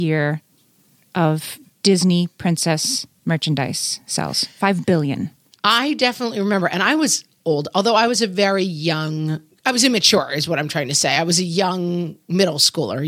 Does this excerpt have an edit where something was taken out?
no; 0 cuts

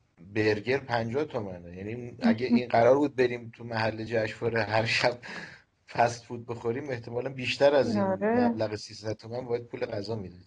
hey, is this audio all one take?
yes; 0 cuts

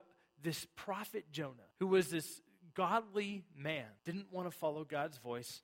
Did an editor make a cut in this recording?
yes; 2 cuts; at 1.7 s, 4.0 s

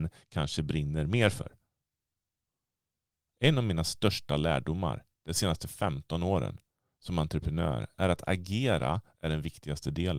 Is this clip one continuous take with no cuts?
yes; 0 cuts

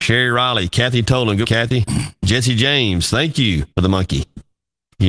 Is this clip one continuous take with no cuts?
no; 2 cuts; at 1.4 s, 3.7 s

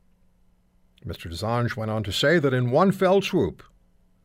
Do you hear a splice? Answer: no; 0 cuts

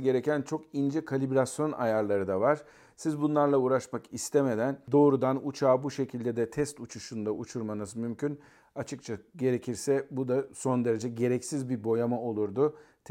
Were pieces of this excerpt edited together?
no; 0 cuts

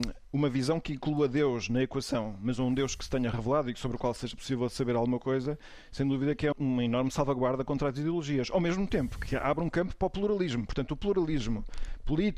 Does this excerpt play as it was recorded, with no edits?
no; 1 cut; at 6.5 s

